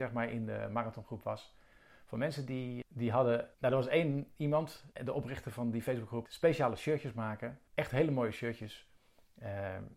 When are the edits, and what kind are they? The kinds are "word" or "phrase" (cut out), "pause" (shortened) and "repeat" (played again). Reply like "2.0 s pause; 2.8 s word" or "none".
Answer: 2.8 s word; 3.5 s pause; 4.9 s pause; 6.3 s phrase; 7.7 s pause